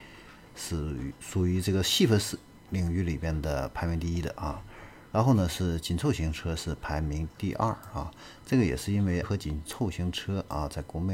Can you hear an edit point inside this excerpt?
yes; 1 cut; at 9.2 s

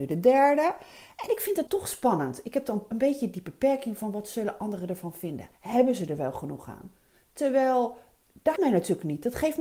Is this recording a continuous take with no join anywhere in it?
no; 4 cuts; at 1.7 s, 2.9 s, 5.5 s, 8.6 s

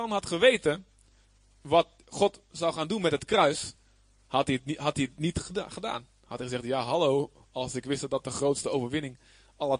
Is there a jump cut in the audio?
no; 0 cuts

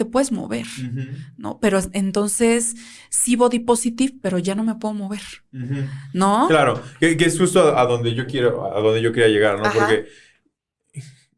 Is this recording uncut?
yes; 0 cuts

